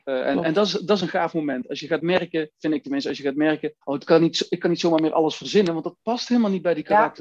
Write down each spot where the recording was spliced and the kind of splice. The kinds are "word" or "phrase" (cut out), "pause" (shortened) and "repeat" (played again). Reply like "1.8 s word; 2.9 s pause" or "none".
3.8 s pause